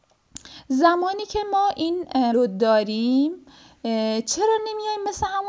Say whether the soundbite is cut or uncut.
cut